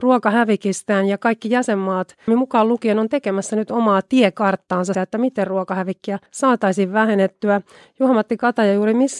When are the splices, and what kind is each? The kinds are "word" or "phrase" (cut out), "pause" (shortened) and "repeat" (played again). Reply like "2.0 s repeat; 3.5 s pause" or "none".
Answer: 2.3 s word; 4.9 s word; 6.3 s pause